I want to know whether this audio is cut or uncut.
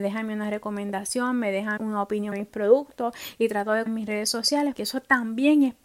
cut